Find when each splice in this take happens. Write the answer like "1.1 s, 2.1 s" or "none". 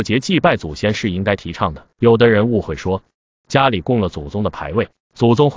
1.9 s